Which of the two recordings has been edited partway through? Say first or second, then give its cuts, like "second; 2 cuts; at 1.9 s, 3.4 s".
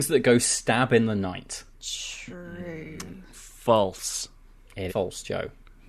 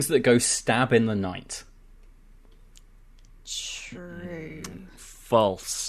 first; 2 cuts; at 1.7 s, 4.9 s